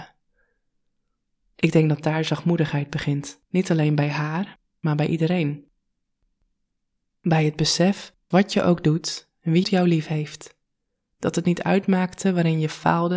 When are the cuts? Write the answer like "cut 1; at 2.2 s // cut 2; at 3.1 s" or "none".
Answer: cut 1; at 3.4 s // cut 2; at 8.3 s // cut 3; at 9.6 s